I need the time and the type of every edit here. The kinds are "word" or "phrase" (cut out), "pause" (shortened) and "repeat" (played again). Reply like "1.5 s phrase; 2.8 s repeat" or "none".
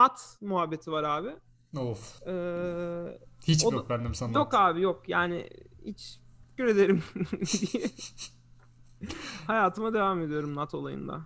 2.2 s pause; 6.6 s word